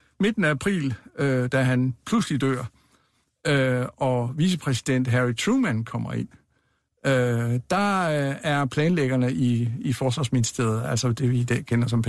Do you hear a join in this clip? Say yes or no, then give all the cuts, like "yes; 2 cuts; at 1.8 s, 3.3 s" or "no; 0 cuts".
no; 0 cuts